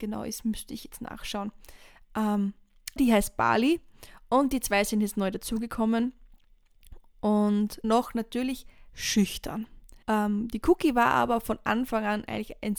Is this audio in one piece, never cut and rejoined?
no; 4 cuts; at 3.0 s, 7.8 s, 8.9 s, 10.0 s

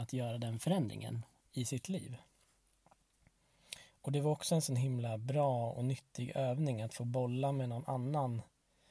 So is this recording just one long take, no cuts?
yes; 0 cuts

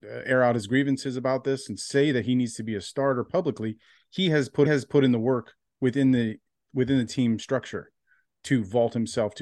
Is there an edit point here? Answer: yes; 1 cut; at 4.7 s

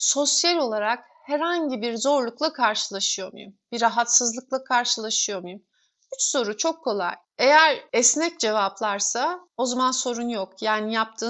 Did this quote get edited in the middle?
no; 0 cuts

